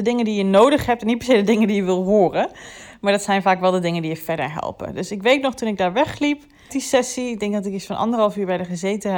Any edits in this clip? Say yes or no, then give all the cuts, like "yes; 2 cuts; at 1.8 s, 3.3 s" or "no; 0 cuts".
yes; 1 cut; at 6.7 s